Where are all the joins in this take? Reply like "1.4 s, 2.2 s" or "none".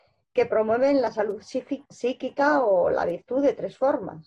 1.9 s

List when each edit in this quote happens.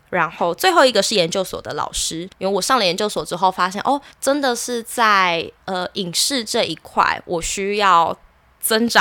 2.3 s, 4.1 s

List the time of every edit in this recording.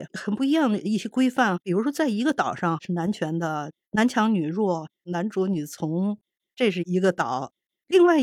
none

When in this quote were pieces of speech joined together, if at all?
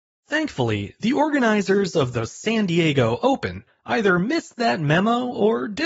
none

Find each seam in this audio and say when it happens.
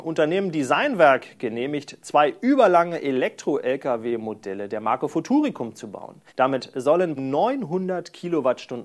6.3 s, 7.2 s

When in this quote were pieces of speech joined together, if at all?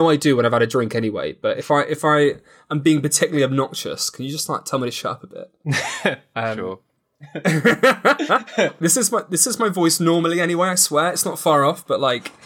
none

